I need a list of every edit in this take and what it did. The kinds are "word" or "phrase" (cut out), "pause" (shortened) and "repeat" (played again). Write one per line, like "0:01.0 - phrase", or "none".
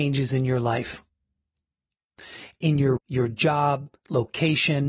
0:03.0 - word
0:04.0 - pause